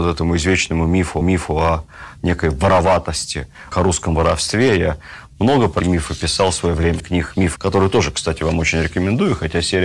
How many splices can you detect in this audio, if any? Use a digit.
5